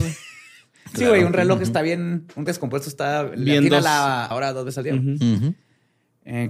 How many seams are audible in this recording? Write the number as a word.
two